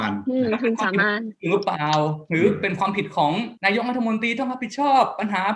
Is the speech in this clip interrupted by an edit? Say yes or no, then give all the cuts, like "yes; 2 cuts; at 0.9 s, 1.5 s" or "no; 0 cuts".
yes; 1 cut; at 3.6 s